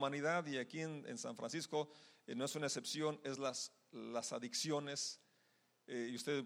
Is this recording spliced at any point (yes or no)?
no